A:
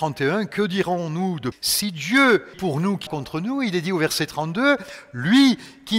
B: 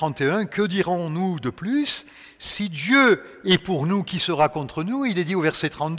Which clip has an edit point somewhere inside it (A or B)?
A